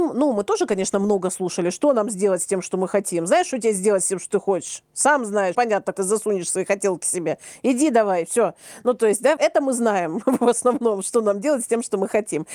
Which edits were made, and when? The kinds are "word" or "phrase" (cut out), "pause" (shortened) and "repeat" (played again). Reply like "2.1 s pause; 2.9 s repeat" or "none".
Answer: 5.5 s word; 5.9 s word; 9.4 s word